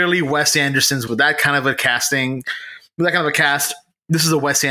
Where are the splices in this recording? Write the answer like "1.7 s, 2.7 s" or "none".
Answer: 1.1 s